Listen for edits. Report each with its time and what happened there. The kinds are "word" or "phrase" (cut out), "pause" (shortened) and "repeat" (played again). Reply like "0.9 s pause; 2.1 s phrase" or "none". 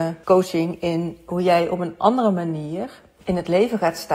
none